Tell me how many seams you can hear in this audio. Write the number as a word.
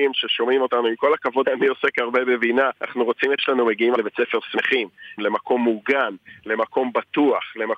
five